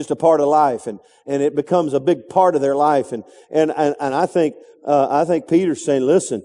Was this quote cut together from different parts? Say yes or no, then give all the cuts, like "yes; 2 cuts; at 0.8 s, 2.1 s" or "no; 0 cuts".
no; 0 cuts